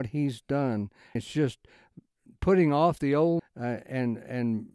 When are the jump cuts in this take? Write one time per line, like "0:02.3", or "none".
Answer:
0:01.2
0:03.4
0:03.8